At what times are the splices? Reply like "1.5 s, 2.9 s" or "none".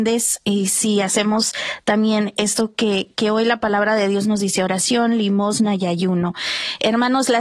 none